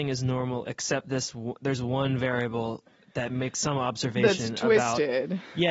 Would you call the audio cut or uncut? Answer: uncut